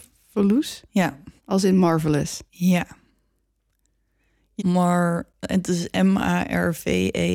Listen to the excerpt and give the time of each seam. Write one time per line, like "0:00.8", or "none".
0:01.4
0:02.5
0:04.6